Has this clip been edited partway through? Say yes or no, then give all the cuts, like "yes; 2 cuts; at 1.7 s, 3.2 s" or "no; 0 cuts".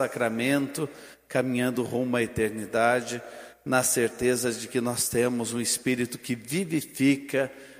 no; 0 cuts